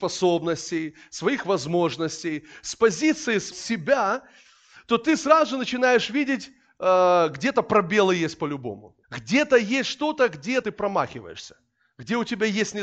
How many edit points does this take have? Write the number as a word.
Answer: three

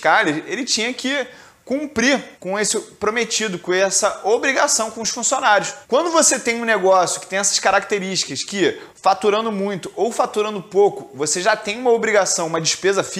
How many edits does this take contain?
three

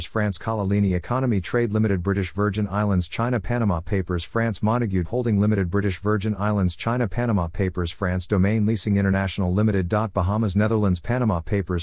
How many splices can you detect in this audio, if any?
one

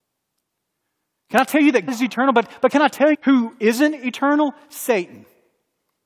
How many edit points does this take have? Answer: two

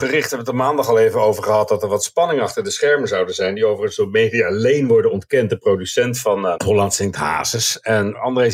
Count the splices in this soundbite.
zero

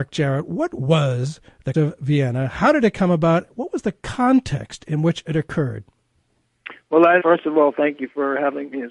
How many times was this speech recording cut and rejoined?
two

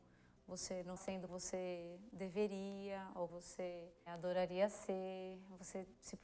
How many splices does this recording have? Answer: three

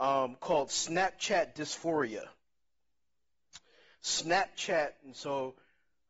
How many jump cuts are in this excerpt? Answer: zero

